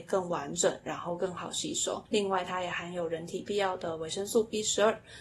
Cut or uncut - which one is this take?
cut